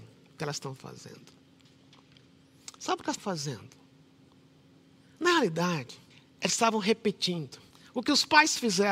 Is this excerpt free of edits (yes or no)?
no